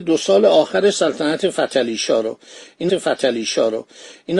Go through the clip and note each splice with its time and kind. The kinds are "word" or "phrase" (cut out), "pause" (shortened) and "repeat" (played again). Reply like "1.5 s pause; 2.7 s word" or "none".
2.9 s repeat